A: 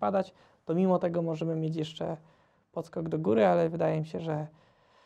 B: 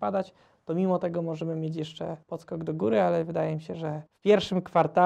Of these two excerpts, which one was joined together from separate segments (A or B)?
B